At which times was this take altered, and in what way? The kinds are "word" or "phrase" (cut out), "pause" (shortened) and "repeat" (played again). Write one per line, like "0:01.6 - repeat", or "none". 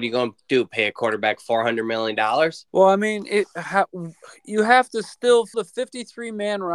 0:02.7 - pause
0:05.5 - phrase